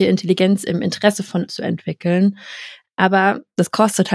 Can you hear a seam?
yes; 1 cut; at 1.5 s

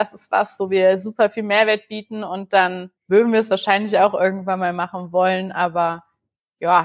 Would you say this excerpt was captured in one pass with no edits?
no; 1 cut; at 3.0 s

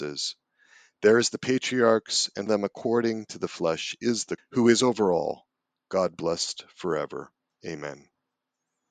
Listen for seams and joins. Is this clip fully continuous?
no; 2 cuts; at 2.5 s, 4.4 s

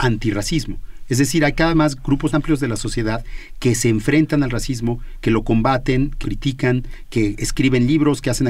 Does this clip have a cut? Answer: yes; 3 cuts; at 1.7 s, 2.3 s, 6.2 s

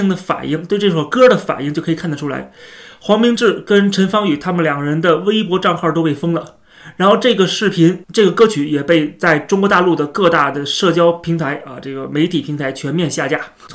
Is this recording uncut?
yes; 0 cuts

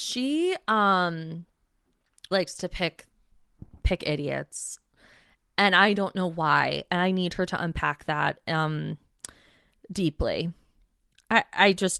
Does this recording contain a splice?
yes; 1 cut; at 2.3 s

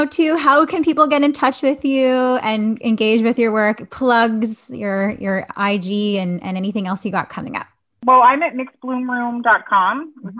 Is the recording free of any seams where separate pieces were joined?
yes; 0 cuts

